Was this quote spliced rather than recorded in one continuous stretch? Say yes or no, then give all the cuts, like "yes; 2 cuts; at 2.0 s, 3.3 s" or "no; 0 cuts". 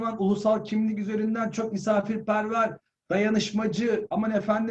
no; 0 cuts